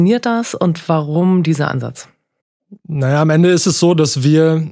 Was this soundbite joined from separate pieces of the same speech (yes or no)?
no